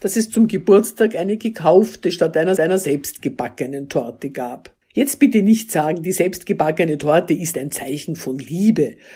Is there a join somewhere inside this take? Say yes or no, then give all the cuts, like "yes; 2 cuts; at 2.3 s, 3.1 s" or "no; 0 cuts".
yes; 3 cuts; at 2.6 s, 4.8 s, 7.5 s